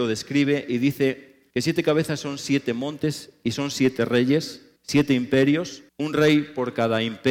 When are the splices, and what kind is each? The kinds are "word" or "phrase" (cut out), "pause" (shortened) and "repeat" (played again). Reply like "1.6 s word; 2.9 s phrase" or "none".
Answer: 1.5 s pause; 4.8 s pause; 5.9 s pause

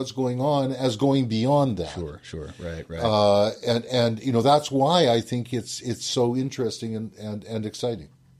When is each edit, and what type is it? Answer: none

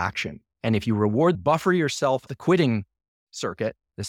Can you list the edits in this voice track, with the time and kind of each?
1.3 s phrase; 2.3 s word

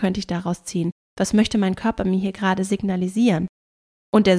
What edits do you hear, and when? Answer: none

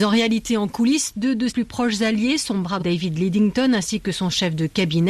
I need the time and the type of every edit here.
1.5 s word; 2.8 s word

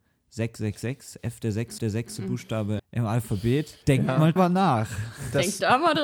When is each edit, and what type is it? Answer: 1.8 s repeat; 2.8 s word; 3.8 s pause; 4.4 s word

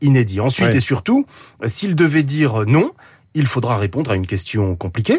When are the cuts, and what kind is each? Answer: none

